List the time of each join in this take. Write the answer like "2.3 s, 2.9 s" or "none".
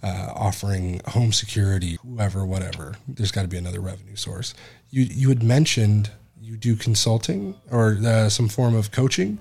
2.0 s